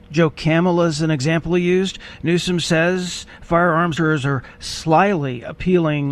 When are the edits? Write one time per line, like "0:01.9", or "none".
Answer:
0:04.0